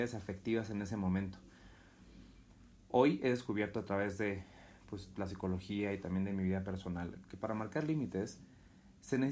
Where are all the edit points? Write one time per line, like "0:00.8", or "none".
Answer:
none